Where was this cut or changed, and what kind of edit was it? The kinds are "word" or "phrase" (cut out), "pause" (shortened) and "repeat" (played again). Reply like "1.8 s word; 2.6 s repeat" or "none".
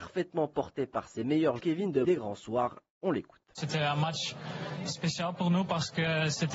1.6 s phrase; 2.0 s word